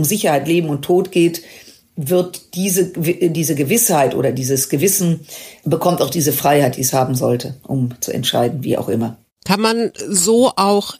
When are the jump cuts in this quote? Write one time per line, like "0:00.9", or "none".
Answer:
none